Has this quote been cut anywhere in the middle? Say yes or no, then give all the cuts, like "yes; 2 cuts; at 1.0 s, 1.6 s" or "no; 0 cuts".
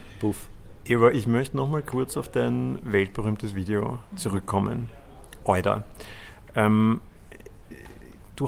no; 0 cuts